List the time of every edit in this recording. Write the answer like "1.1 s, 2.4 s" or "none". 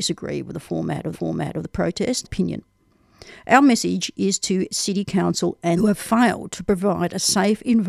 1.1 s, 2.2 s, 5.8 s